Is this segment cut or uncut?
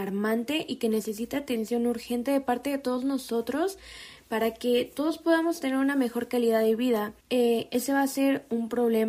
cut